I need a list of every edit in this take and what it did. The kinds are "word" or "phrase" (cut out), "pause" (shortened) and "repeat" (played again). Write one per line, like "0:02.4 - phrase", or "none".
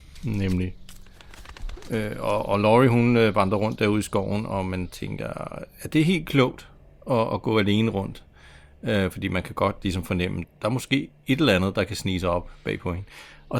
0:10.4 - word